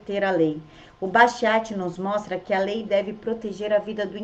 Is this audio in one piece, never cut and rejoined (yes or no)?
yes